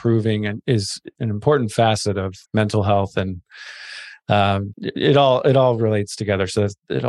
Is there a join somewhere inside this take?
yes; 3 cuts; at 1.1 s, 2.4 s, 4.7 s

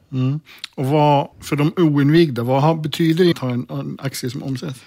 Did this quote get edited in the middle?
yes; 2 cuts; at 1.3 s, 3.3 s

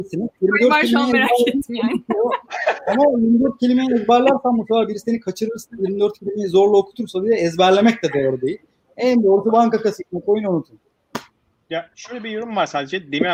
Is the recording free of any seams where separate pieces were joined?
yes; 0 cuts

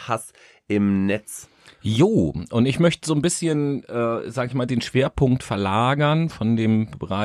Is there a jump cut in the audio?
no; 0 cuts

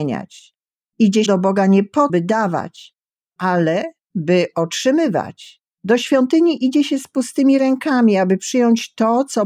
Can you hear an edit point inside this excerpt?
yes; 3 cuts; at 1.3 s, 2.1 s, 5.7 s

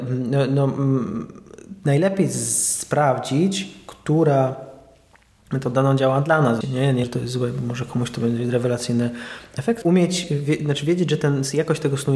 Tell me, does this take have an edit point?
yes; 3 cuts; at 6.6 s, 7.0 s, 9.8 s

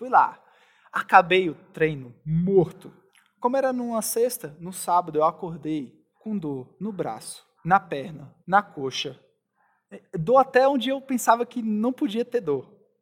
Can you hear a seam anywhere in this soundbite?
yes; 4 cuts; at 3.1 s, 6.1 s, 7.6 s, 8.4 s

